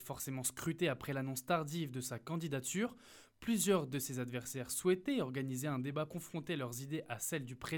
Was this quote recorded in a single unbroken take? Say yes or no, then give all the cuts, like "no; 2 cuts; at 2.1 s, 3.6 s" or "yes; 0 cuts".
no; 1 cut; at 6.1 s